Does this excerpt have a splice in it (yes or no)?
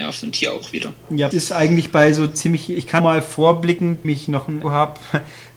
yes